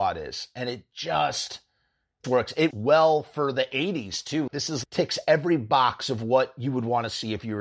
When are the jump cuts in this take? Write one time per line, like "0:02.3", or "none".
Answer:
0:02.2
0:02.7
0:04.5
0:04.8